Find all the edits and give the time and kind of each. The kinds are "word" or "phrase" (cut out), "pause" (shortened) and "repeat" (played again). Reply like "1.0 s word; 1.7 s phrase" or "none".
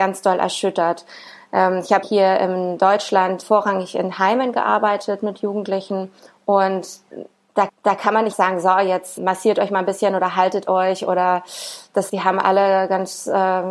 2.0 s phrase; 3.4 s word; 6.2 s pause; 7.7 s repeat; 8.3 s word; 9.2 s word; 12.1 s word